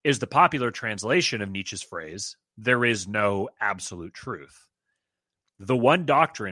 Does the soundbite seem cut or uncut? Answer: uncut